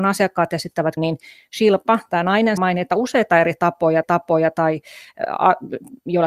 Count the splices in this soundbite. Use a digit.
3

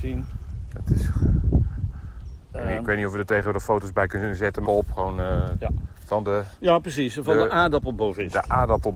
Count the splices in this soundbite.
2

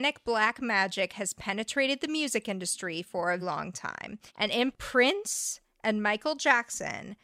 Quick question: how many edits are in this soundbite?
3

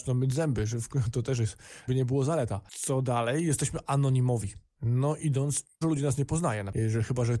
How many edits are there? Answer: 2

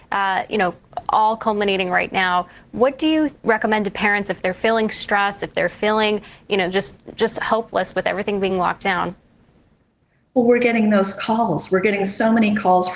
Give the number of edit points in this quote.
0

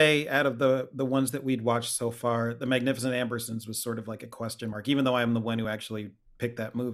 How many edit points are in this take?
0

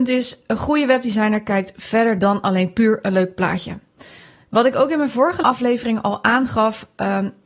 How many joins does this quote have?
0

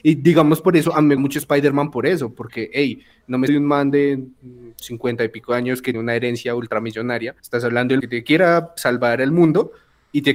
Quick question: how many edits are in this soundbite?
5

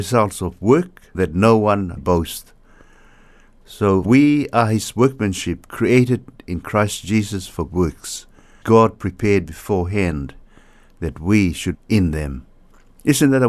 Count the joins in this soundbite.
6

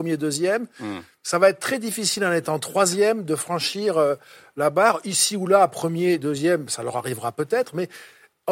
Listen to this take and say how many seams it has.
0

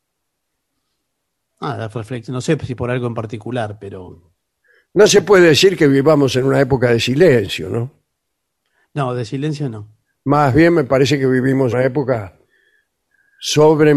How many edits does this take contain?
3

